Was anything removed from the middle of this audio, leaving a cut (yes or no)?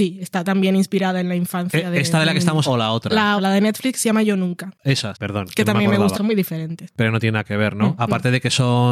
yes